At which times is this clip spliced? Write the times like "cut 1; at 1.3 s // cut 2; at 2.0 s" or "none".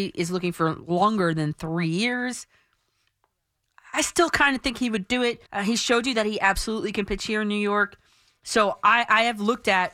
cut 1; at 5.5 s